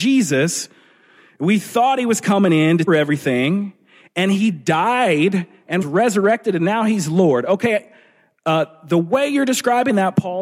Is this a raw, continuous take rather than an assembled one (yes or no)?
no